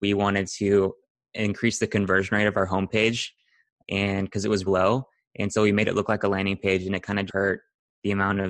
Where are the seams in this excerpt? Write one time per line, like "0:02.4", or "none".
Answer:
0:04.7
0:07.3